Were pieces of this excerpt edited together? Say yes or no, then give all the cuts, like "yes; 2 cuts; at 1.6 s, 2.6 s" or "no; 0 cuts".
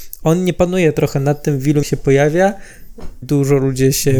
yes; 2 cuts; at 1.8 s, 3.2 s